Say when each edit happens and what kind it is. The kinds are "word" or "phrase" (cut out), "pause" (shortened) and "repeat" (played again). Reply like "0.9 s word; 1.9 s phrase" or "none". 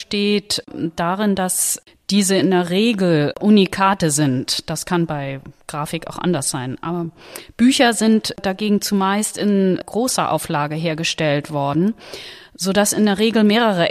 none